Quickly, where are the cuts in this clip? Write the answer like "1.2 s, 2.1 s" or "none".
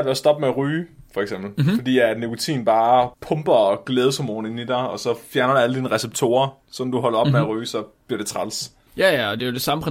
3.1 s, 8.9 s